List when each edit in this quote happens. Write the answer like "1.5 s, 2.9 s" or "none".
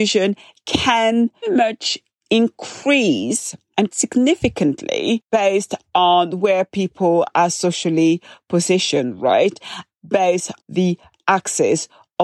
1.4 s, 3.9 s, 10.6 s